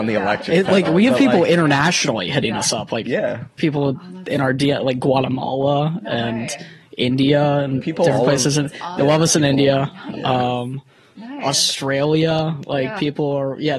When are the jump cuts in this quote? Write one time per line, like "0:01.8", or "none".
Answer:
none